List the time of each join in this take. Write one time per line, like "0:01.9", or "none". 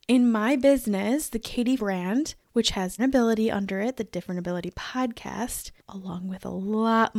0:01.8
0:02.4
0:03.0
0:05.8

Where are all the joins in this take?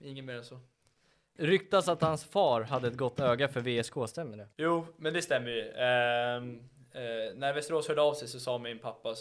0:04.5

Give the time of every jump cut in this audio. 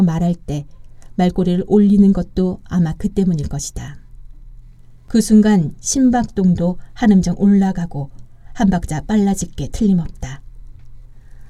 none

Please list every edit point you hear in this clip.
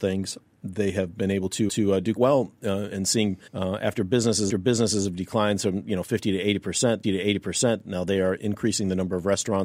0:01.7
0:02.2
0:02.9
0:03.5
0:04.5
0:07.0

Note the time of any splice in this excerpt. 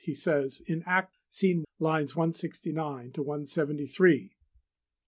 0:01.1
0:01.6

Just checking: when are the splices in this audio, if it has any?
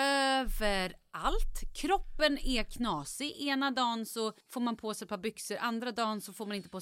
0:04.4

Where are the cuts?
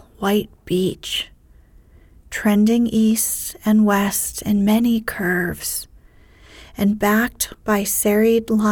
none

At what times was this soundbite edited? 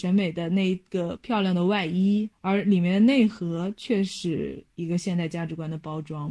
0:02.3

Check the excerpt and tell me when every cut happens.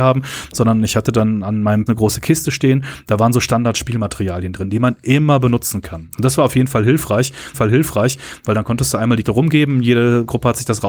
0:01.9
0:07.5
0:09.2

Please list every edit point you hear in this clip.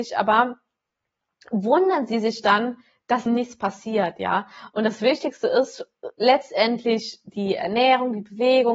0:03.3

